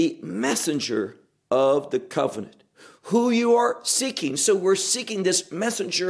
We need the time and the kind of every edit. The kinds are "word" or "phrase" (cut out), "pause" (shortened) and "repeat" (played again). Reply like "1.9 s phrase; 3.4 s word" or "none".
none